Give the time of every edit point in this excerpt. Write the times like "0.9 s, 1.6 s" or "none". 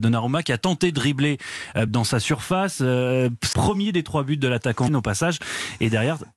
1.9 s, 3.5 s, 4.9 s